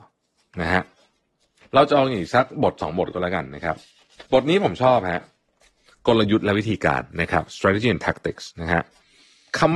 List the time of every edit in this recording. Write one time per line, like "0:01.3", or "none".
0:04.3